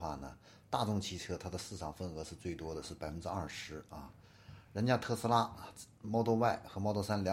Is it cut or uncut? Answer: uncut